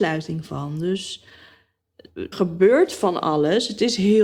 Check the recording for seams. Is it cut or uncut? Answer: cut